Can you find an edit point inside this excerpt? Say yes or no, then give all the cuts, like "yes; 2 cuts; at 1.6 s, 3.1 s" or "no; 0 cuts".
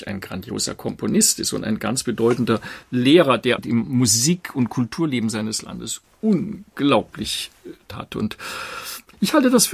yes; 2 cuts; at 3.6 s, 7.9 s